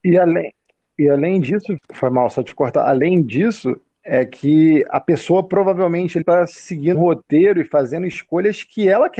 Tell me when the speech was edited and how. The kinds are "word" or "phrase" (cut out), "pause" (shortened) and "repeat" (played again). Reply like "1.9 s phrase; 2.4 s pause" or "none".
1.8 s word; 6.2 s word; 6.9 s word